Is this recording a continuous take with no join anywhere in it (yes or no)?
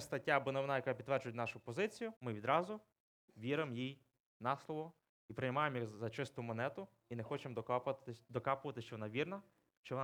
no